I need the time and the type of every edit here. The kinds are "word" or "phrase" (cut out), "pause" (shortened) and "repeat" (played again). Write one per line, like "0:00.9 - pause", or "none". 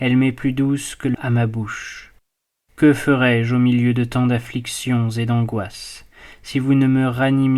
0:01.1 - word